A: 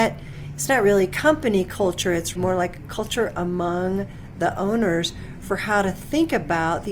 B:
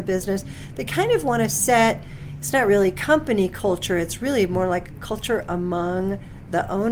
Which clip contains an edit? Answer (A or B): A